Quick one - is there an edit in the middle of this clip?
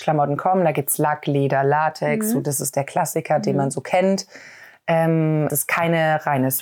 yes; 1 cut; at 5.5 s

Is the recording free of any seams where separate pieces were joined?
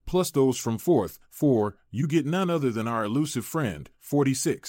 yes; 0 cuts

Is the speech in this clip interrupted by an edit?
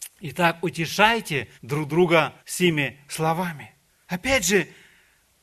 yes; 3 cuts; at 1.6 s, 2.4 s, 3.9 s

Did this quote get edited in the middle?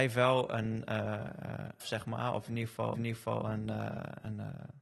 yes; 2 cuts; at 1.8 s, 2.9 s

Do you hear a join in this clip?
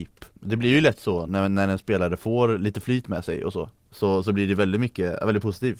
no; 0 cuts

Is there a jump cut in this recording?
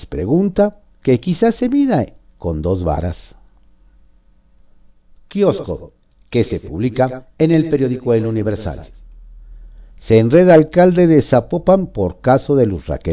no; 0 cuts

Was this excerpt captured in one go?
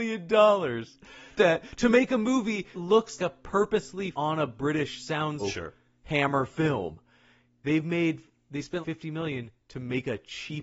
no; 6 cuts; at 1.4 s, 2.7 s, 3.2 s, 4.1 s, 5.4 s, 8.8 s

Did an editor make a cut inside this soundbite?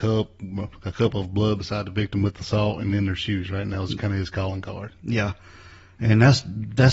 no; 0 cuts

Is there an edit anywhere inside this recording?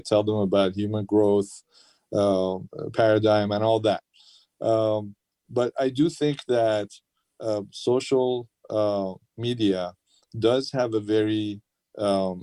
no; 0 cuts

